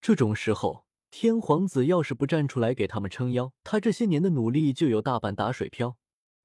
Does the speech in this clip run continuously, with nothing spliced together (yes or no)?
no